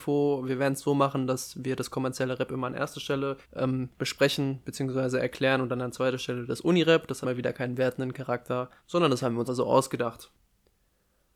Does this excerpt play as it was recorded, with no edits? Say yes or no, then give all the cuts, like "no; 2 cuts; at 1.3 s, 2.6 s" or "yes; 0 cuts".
no; 4 cuts; at 3.4 s, 7.2 s, 8.8 s, 9.5 s